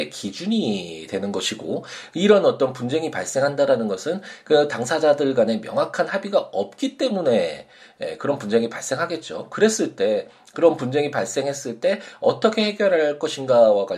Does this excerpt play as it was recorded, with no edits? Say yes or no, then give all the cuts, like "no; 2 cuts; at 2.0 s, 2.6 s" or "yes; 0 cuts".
yes; 0 cuts